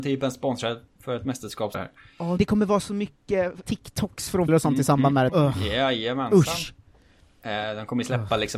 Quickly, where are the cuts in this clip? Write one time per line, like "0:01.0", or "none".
0:01.7
0:02.4
0:03.6
0:04.5
0:05.3